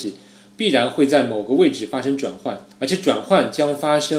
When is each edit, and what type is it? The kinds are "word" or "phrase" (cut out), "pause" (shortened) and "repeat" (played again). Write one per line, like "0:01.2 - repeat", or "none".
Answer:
0:02.7 - pause